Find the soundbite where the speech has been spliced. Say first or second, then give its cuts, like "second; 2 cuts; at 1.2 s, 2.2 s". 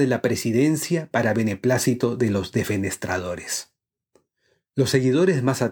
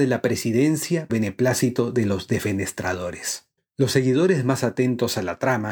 second; 2 cuts; at 1.1 s, 3.6 s